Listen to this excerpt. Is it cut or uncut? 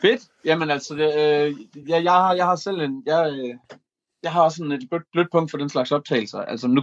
uncut